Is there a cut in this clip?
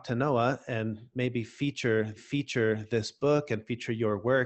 yes; 1 cut; at 2.2 s

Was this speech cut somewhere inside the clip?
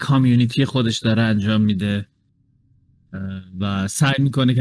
no; 0 cuts

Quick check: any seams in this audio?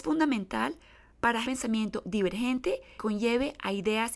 yes; 2 cuts; at 1.4 s, 3.0 s

